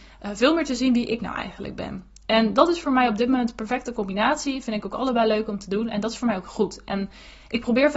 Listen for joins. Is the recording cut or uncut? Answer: uncut